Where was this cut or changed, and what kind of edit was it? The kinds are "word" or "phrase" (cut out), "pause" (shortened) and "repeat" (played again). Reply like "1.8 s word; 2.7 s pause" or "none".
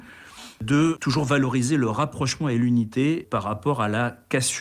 none